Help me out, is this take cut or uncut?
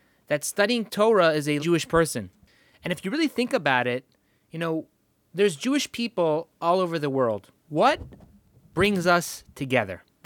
cut